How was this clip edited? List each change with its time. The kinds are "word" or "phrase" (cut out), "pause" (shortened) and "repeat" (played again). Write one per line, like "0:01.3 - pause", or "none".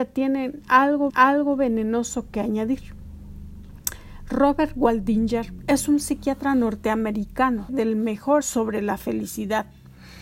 0:01.1 - repeat
0:07.7 - word
0:08.4 - word